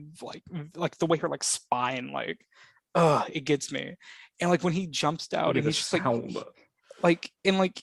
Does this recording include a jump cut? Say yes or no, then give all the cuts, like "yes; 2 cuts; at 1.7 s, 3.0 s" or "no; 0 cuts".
no; 0 cuts